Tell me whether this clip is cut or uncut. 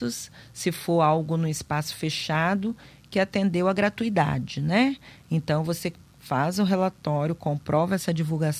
uncut